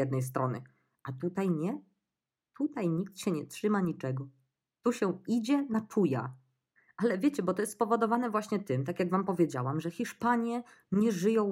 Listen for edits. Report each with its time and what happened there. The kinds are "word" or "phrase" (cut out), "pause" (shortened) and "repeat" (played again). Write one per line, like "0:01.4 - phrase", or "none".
none